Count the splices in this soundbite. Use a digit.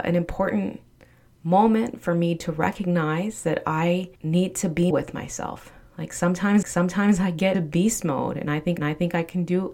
5